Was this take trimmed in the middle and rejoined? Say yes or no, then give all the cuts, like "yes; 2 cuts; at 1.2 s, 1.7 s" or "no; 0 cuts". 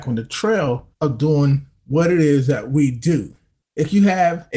no; 0 cuts